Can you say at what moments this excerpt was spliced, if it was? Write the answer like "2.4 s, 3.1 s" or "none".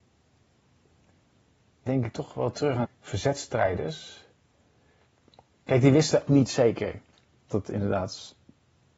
1.9 s, 2.5 s, 2.8 s, 6.3 s, 7.5 s